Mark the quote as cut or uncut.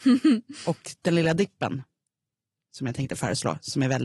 uncut